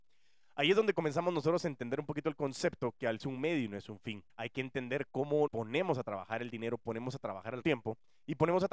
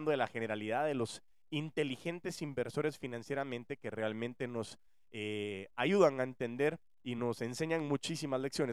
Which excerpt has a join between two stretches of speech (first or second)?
first